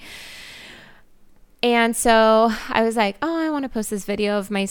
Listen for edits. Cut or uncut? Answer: uncut